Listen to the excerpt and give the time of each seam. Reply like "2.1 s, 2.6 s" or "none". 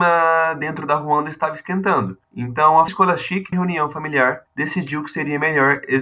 2.2 s, 2.9 s, 3.5 s, 4.5 s